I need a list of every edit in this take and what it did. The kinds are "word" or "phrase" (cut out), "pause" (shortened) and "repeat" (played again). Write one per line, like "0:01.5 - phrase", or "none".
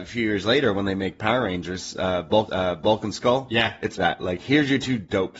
0:02.5 - repeat
0:04.0 - word